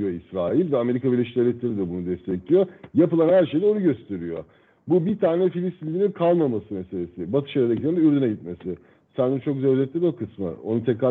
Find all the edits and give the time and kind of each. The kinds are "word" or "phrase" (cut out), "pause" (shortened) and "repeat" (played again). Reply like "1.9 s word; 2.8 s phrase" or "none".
none